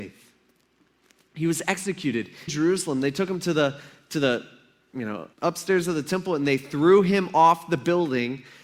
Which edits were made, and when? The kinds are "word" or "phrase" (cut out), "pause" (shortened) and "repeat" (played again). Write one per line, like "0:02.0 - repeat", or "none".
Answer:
0:02.5 - word
0:05.3 - pause